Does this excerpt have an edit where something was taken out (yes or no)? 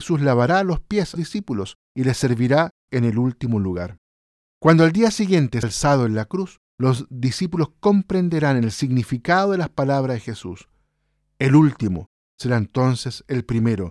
yes